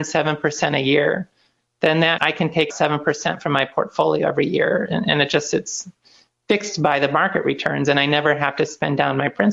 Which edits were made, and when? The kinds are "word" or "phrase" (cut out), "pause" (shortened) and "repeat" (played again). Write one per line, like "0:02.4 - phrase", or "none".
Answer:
0:02.2 - word
0:02.7 - word